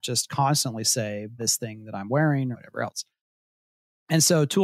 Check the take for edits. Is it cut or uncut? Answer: cut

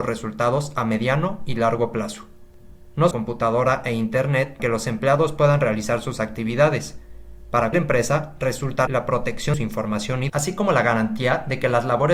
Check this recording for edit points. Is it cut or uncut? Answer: cut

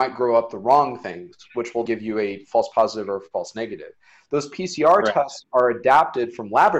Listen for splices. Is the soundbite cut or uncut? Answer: cut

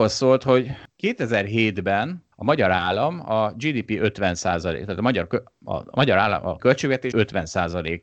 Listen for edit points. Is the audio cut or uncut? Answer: cut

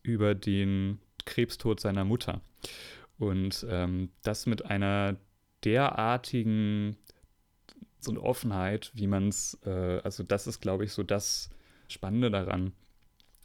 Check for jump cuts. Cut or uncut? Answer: cut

